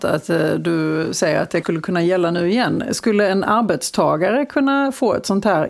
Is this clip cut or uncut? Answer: cut